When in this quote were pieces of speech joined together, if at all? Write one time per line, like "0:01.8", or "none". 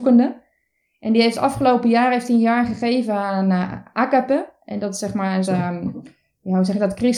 0:05.4